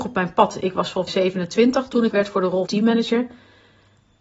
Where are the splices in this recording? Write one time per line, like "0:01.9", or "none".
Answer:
0:01.1
0:02.1
0:02.7